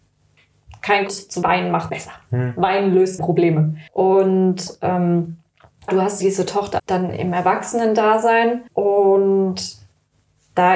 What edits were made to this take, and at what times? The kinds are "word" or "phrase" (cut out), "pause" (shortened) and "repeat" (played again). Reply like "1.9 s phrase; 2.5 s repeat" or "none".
1.1 s word; 1.4 s word; 1.9 s phrase; 3.2 s word; 3.9 s pause; 5.9 s word; 6.2 s word; 6.8 s word; 8.7 s pause